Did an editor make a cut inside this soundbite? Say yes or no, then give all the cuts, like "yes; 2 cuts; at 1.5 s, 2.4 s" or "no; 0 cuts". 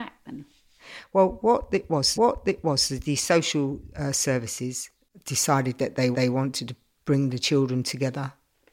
yes; 2 cuts; at 2.1 s, 6.1 s